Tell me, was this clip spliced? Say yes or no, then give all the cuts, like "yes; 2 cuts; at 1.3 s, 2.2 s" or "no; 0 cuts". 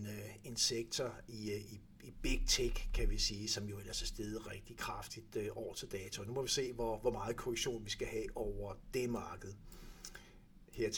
yes; 1 cut; at 4.4 s